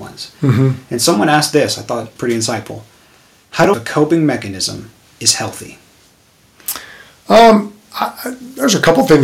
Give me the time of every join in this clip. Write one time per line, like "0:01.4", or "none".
0:02.2
0:03.7